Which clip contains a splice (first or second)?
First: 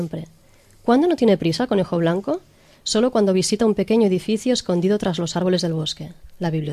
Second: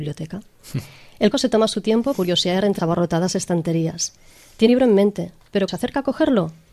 second